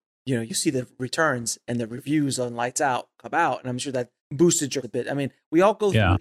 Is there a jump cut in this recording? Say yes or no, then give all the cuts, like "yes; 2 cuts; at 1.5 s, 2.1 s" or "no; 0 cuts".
yes; 2 cuts; at 4.2 s, 4.8 s